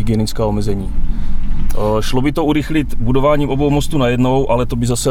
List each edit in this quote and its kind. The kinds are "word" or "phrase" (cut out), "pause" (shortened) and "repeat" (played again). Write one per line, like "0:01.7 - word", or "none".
none

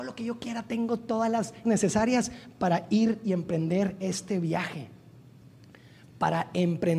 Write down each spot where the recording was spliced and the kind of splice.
0:01.6 - word

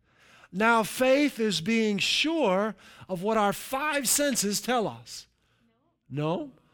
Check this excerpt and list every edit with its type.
none

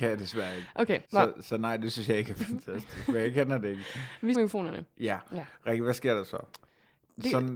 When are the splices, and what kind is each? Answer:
0:01.0 - pause
0:04.3 - word

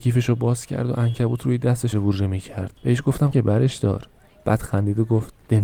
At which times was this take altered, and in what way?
0:01.9 - word
0:02.8 - pause
0:03.3 - word

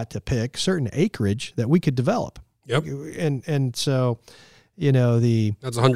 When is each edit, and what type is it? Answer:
none

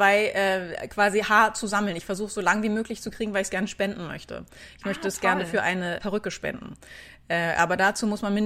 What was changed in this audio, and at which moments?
0:06.0 - word

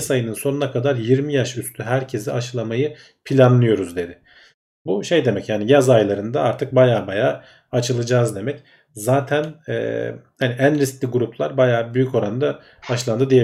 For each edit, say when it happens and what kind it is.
none

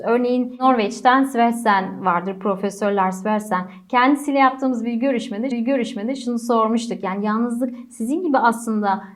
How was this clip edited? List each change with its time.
0:05.5 - repeat

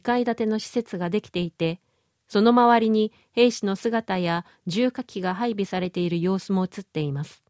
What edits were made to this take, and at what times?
none

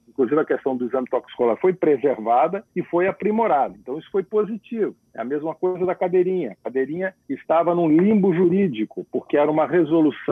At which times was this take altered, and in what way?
0:02.7 - pause
0:07.2 - pause

